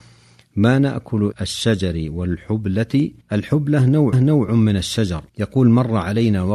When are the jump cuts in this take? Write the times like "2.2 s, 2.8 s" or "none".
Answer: 1.3 s, 3.2 s, 4.1 s, 5.3 s